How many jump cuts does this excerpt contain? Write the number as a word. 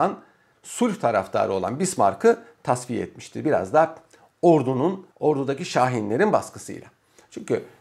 one